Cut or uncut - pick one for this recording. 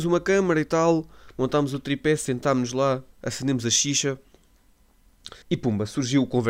cut